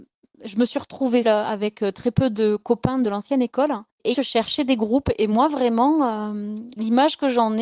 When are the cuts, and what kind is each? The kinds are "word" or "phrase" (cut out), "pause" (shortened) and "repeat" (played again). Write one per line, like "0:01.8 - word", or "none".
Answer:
0:01.2 - word
0:04.1 - phrase